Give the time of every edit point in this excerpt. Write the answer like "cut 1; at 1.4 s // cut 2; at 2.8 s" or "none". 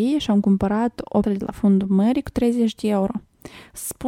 cut 1; at 1.2 s